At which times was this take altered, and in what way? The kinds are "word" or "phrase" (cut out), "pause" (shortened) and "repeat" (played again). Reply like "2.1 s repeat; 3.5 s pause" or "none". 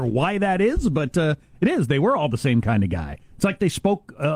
none